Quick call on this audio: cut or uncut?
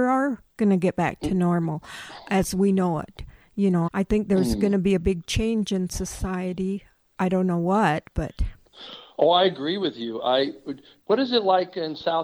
cut